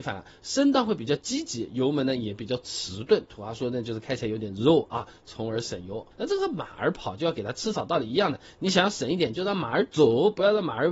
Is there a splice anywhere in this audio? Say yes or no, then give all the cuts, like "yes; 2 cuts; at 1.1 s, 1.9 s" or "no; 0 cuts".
yes; 1 cut; at 6.1 s